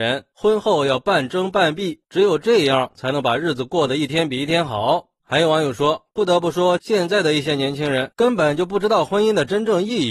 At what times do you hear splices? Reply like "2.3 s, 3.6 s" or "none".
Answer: 2.0 s